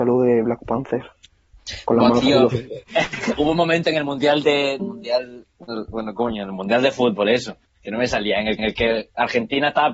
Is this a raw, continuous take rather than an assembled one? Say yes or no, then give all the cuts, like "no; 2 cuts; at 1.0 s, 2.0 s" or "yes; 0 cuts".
no; 3 cuts; at 4.8 s, 5.5 s, 8.6 s